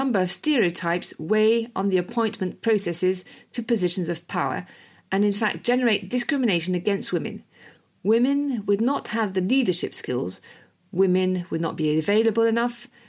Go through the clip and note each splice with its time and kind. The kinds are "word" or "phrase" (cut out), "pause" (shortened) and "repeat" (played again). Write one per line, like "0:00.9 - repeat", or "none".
none